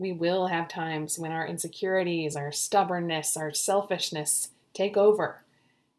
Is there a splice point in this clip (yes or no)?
no